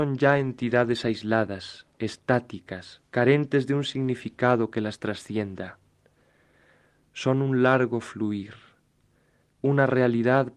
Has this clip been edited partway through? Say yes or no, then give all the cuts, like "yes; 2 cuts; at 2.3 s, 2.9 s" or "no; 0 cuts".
yes; 1 cut; at 3.1 s